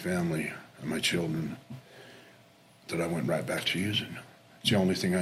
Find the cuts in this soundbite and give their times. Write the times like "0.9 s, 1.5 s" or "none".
none